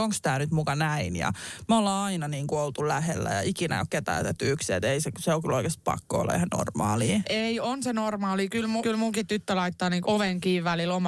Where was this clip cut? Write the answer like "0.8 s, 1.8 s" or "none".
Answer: 8.8 s, 10.0 s

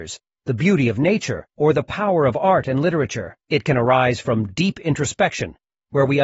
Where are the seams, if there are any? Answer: 1.5 s, 3.4 s

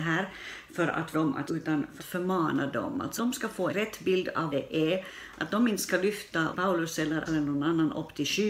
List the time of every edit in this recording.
1.1 s, 1.5 s, 2.0 s, 3.2 s, 3.7 s, 4.5 s, 6.5 s, 7.3 s

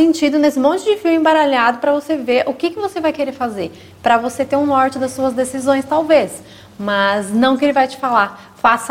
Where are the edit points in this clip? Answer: none

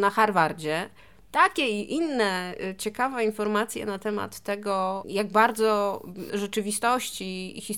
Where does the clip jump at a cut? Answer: 6.3 s

